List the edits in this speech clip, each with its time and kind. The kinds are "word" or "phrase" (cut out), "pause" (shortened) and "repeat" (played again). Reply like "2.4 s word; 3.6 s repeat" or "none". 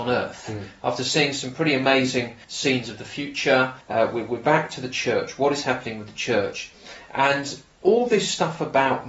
2.4 s pause; 3.8 s pause